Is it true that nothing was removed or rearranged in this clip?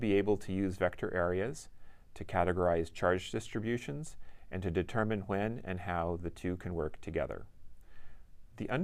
yes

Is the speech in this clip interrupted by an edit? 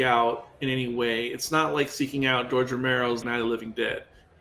yes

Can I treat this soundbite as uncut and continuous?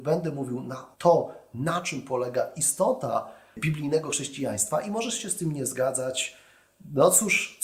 no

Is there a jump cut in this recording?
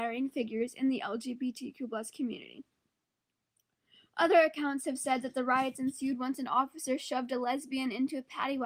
no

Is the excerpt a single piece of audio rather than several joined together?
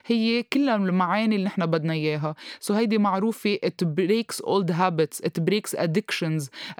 yes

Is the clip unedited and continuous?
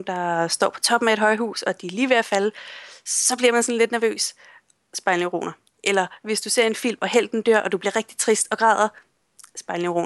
yes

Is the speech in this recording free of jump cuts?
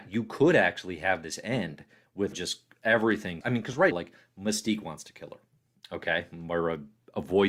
no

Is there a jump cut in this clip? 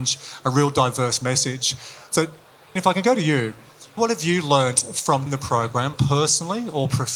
yes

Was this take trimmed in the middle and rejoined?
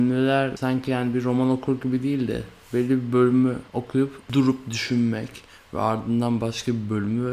yes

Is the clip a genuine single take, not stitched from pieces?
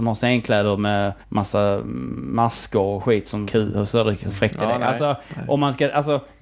no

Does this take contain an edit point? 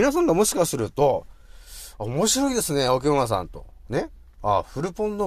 no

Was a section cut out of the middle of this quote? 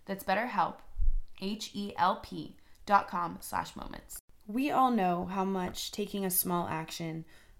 yes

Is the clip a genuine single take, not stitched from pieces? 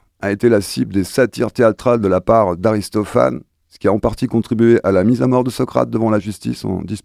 yes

